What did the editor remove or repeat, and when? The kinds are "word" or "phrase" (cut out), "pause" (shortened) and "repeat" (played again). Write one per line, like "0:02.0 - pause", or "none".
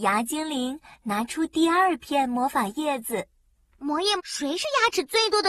0:04.2 - phrase